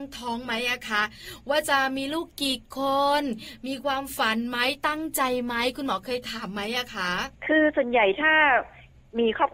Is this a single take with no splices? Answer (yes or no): no